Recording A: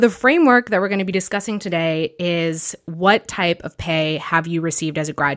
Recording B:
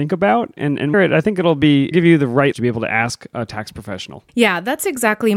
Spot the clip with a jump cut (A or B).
B